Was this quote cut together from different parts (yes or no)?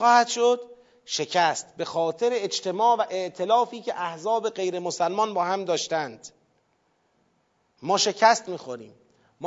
no